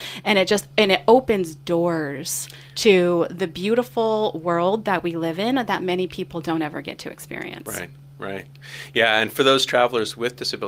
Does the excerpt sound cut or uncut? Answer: uncut